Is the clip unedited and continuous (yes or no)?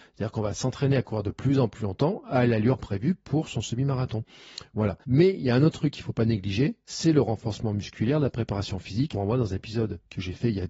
no